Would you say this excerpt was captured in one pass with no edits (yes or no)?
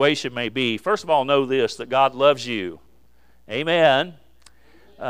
yes